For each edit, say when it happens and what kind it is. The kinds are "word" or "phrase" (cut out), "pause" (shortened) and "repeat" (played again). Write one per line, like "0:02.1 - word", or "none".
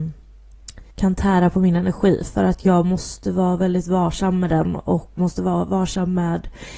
0:00.9 - pause
0:05.2 - word

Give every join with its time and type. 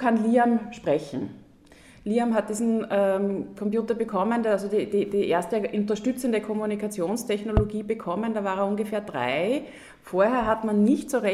none

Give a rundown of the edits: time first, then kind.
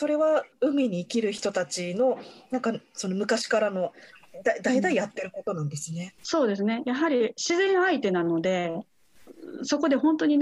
0:06.2 - pause

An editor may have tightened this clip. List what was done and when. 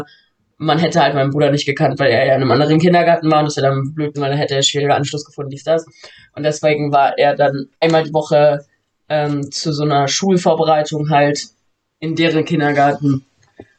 0:04.1 - word

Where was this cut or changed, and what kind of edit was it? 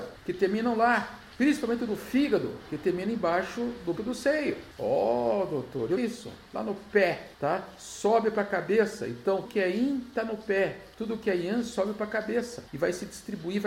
0:04.0 - word
0:06.0 - phrase
0:09.4 - word

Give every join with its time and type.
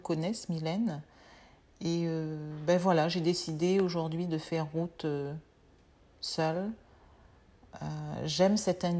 none

